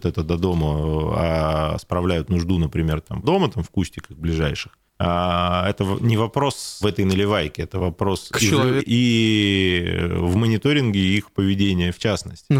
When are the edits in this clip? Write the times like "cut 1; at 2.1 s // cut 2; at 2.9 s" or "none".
cut 1; at 3.2 s // cut 2; at 4.9 s // cut 3; at 6.8 s // cut 4; at 8.8 s